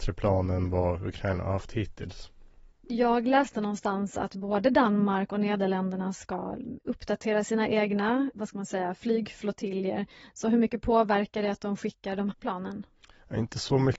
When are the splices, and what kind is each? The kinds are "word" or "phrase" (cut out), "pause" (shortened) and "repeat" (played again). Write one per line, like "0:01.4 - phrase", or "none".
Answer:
0:08.3 - word
0:12.3 - word